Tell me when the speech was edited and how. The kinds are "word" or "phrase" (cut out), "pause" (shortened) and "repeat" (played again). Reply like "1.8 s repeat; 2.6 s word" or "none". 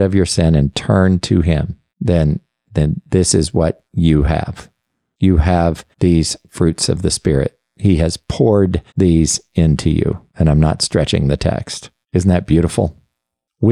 1.9 s pause; 3.9 s pause; 5.9 s pause; 8.9 s pause; 10.3 s pause; 12.0 s pause